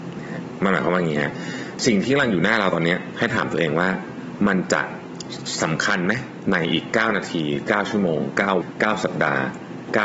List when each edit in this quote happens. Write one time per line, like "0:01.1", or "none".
0:08.6